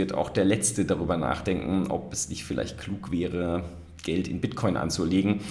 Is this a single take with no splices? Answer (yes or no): yes